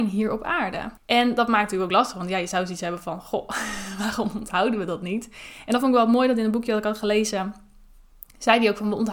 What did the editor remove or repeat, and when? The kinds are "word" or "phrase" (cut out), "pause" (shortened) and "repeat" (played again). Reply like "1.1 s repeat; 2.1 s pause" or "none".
1.0 s pause